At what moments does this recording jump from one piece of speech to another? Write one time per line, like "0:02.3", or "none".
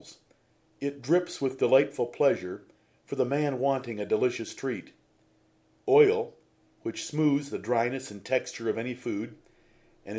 none